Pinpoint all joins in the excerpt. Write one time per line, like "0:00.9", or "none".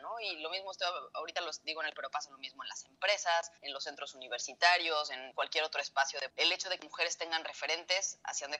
0:01.9
0:03.6
0:05.3
0:06.3
0:06.8